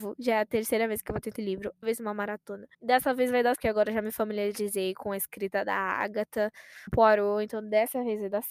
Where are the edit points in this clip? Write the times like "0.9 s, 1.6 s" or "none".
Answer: 1.4 s, 1.8 s, 2.7 s, 3.6 s, 6.9 s